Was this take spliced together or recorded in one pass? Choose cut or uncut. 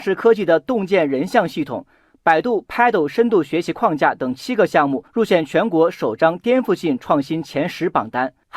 cut